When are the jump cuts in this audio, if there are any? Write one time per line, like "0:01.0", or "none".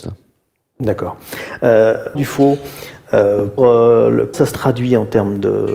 0:02.1
0:03.6
0:04.3